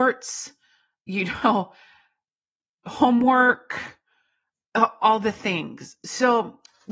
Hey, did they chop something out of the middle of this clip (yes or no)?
no